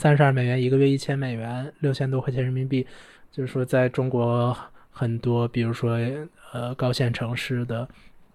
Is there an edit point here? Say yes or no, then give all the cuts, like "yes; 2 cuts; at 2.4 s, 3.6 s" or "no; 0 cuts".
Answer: no; 0 cuts